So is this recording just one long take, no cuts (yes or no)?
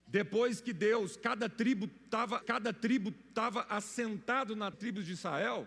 no